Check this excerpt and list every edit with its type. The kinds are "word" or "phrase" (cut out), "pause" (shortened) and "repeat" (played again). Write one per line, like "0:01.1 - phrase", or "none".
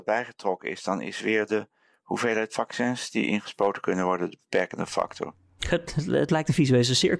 none